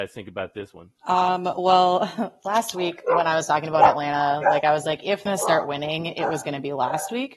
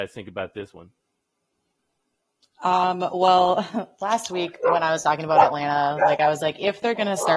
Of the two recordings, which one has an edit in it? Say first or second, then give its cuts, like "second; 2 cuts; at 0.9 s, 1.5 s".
first; 2 cuts; at 1.0 s, 5.3 s